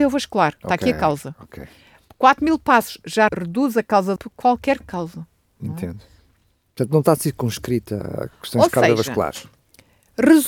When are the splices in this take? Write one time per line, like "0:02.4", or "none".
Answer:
0:03.3
0:04.2
0:04.8